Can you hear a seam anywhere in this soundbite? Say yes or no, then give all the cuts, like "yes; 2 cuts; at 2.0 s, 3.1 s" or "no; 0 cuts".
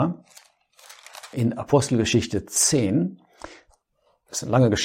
yes; 1 cut; at 1.3 s